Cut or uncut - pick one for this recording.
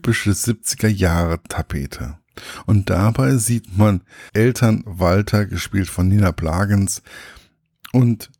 cut